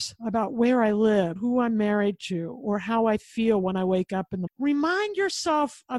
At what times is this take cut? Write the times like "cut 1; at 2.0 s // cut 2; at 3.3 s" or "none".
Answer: cut 1; at 1.4 s // cut 2; at 4.5 s